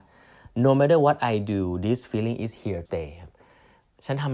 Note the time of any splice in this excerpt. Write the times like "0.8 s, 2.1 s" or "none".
2.9 s